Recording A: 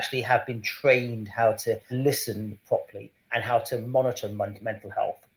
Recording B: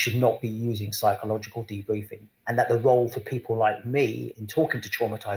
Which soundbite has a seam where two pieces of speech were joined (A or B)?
B